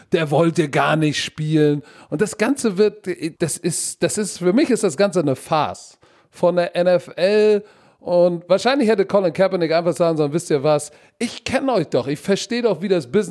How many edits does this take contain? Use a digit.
1